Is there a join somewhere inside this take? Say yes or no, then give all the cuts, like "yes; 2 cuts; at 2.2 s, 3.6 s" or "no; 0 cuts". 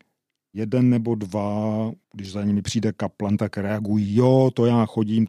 yes; 1 cut; at 2.0 s